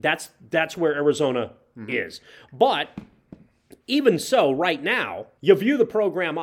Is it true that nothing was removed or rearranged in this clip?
no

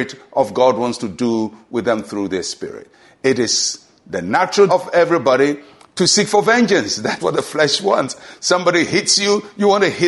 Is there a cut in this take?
yes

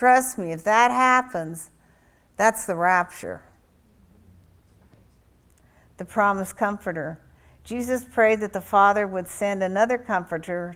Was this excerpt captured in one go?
yes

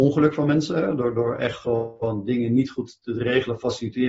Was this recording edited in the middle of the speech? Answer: no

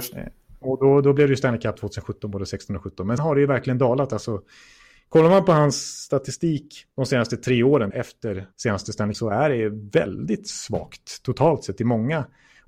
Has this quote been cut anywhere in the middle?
yes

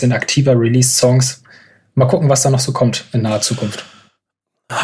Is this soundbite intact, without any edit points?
yes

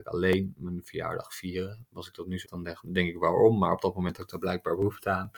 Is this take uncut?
no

